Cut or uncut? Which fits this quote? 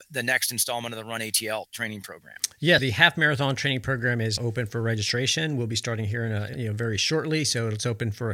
cut